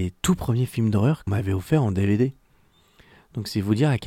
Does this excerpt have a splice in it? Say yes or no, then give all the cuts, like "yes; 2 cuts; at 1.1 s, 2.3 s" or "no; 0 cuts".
yes; 1 cut; at 1.3 s